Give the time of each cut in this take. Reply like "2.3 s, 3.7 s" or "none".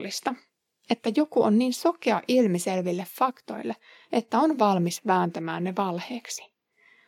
none